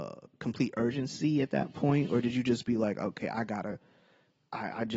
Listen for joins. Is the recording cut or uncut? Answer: uncut